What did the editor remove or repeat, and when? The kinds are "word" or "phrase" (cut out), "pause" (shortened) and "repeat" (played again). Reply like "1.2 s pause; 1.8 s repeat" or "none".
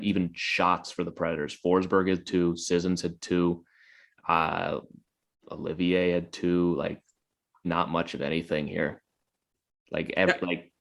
7.6 s word